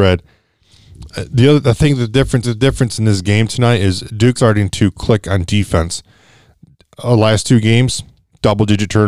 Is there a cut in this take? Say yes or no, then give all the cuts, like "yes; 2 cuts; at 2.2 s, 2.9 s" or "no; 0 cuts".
yes; 2 cuts; at 2.4 s, 4.4 s